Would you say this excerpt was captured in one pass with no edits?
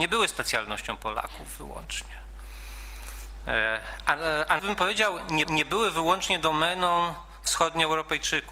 no; 2 cuts; at 4.6 s, 5.4 s

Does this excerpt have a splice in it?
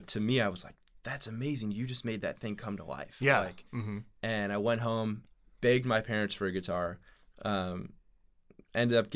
no; 0 cuts

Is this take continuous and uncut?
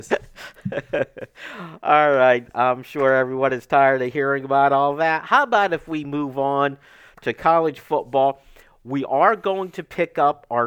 yes; 0 cuts

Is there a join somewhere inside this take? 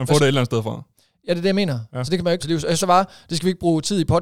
yes; 2 cuts; at 2.4 s, 2.8 s

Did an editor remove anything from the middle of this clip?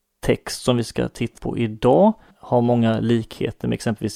yes; 2 cuts; at 1.4 s, 2.3 s

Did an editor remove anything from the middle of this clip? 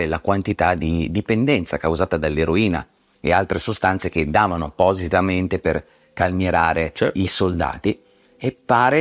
no; 0 cuts

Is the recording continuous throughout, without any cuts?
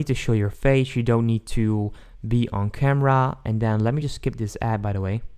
yes; 0 cuts

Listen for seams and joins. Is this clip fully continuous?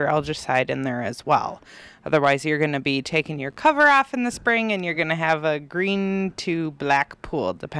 yes; 0 cuts

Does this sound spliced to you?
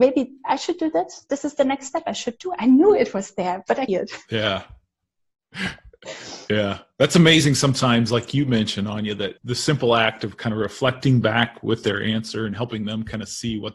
yes; 2 cuts; at 3.9 s, 9.4 s

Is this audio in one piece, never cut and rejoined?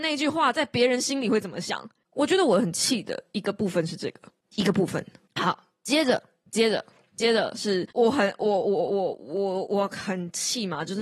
yes; 0 cuts

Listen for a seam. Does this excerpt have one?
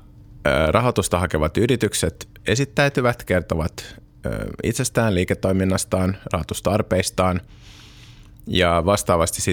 no; 0 cuts

